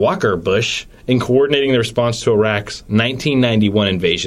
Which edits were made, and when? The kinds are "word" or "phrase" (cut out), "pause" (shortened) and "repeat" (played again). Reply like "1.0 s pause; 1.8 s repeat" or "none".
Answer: none

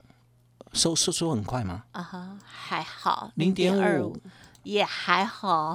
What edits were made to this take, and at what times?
none

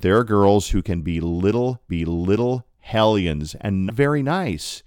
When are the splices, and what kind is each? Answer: 1.9 s repeat; 3.9 s word

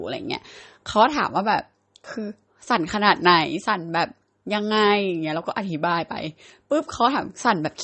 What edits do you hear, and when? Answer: none

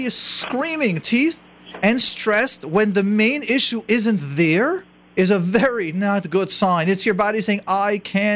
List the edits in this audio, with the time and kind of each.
1.0 s phrase; 5.0 s pause

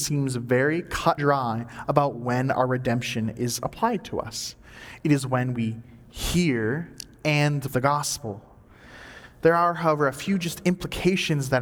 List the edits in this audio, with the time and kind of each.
1.2 s word; 7.7 s word

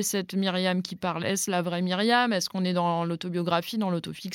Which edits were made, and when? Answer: none

